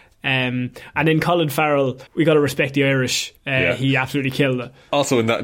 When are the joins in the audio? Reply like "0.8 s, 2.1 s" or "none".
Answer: 2.1 s, 3.4 s